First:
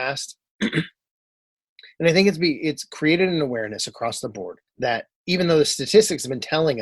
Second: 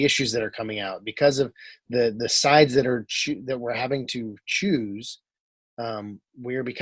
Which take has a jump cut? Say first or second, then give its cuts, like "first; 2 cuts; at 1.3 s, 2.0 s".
first; 1 cut; at 4.7 s